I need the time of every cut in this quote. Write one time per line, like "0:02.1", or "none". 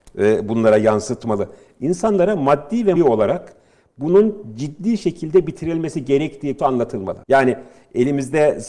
0:03.0
0:06.6
0:07.2